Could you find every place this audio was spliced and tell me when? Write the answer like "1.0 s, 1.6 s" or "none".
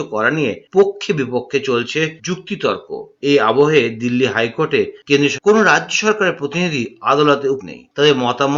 2.2 s, 5.4 s, 7.6 s